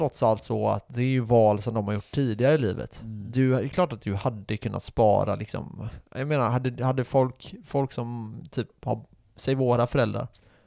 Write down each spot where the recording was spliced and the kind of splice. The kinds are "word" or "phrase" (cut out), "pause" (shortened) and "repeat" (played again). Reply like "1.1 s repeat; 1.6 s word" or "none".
none